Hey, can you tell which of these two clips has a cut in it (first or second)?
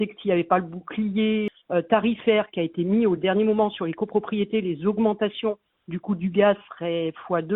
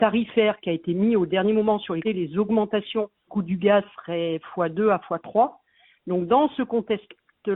second